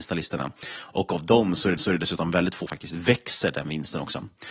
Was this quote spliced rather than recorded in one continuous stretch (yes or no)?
yes